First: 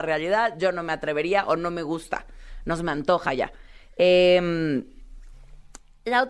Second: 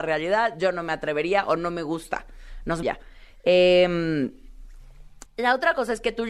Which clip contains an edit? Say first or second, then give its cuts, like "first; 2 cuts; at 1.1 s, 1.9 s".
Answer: second; 2 cuts; at 2.8 s, 5.3 s